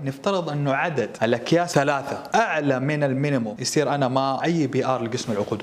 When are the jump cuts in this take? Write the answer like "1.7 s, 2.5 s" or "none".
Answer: 1.7 s, 4.4 s